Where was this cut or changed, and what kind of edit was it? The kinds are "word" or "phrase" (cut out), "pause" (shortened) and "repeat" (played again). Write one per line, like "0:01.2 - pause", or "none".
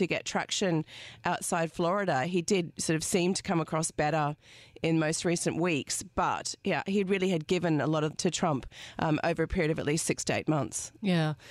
0:08.1 - phrase